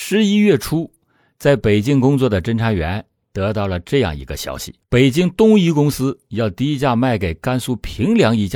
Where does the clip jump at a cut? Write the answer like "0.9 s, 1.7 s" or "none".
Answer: 4.8 s